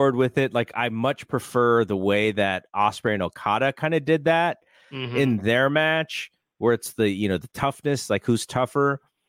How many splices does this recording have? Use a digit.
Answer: 0